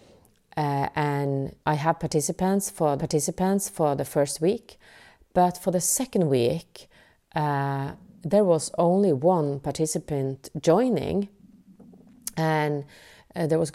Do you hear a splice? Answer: yes; 2 cuts; at 1.6 s, 3.0 s

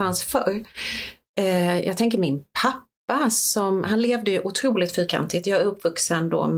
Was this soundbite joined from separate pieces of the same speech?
no; 0 cuts

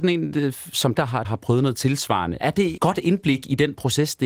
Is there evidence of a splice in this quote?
yes; 4 cuts; at 0.9 s, 1.2 s, 2.4 s, 2.8 s

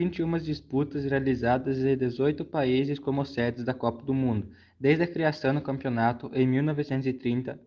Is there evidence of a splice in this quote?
no; 0 cuts

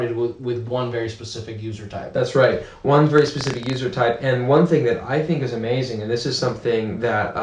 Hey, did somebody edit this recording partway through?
no; 0 cuts

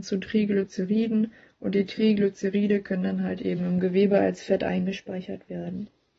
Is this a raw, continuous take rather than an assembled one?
yes; 0 cuts

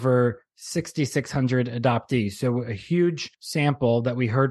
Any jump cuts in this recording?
yes; 1 cut; at 3.3 s

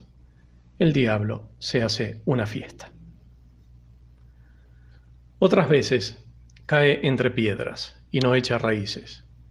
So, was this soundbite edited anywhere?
no; 0 cuts

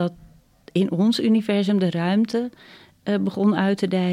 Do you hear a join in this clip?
no; 0 cuts

